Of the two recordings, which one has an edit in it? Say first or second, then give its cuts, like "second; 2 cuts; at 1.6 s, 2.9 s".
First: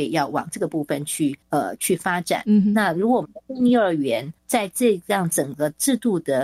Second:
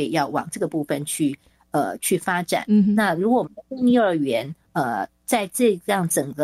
first; 2 cuts; at 1.4 s, 4.4 s